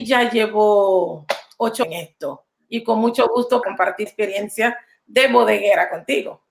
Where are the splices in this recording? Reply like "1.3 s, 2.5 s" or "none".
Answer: 1.8 s, 3.6 s, 4.1 s